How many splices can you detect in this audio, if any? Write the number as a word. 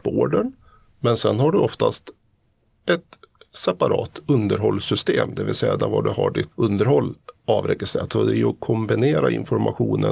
one